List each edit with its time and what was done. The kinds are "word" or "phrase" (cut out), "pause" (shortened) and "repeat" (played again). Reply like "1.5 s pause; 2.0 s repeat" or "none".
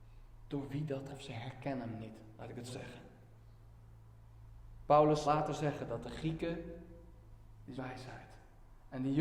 1.1 s word; 2.7 s word; 5.3 s word; 7.8 s word